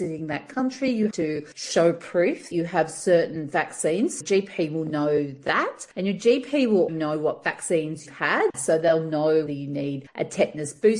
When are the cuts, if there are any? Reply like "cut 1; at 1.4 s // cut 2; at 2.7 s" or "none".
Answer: cut 1; at 1.1 s // cut 2; at 2.5 s // cut 3; at 4.2 s // cut 4; at 6.9 s // cut 5; at 8.1 s // cut 6; at 9.5 s